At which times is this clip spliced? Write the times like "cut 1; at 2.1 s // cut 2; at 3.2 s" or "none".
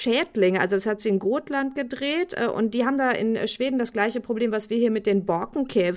none